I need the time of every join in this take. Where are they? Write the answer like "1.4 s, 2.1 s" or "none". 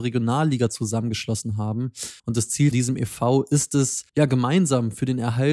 2.2 s, 2.7 s, 4.1 s